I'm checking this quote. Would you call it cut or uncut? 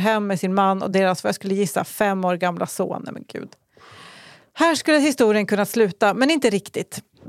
uncut